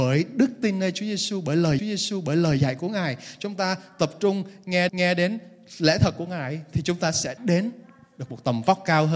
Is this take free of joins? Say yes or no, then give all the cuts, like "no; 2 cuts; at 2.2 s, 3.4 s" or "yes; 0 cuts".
no; 3 cuts; at 1.8 s, 4.9 s, 7.4 s